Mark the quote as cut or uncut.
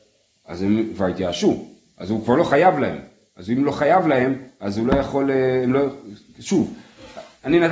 uncut